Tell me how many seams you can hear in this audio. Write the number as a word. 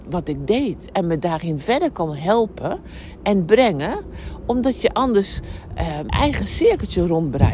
one